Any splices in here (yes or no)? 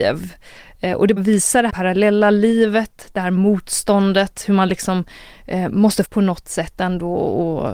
yes